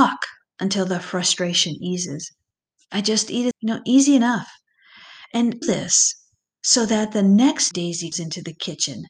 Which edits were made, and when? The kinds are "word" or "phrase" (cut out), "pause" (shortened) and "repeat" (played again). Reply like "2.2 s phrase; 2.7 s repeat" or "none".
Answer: 2.9 s phrase; 3.5 s word; 5.6 s phrase; 7.7 s word; 8.1 s word